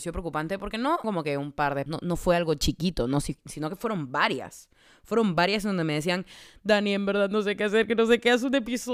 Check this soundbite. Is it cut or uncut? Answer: cut